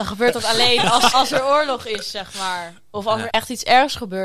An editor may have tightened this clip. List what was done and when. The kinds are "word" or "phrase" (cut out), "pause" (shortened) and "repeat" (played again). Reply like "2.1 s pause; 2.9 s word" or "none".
1.1 s word; 3.3 s word